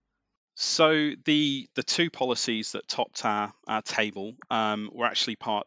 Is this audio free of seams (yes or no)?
yes